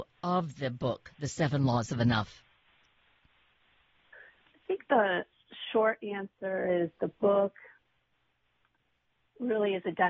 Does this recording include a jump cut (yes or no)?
no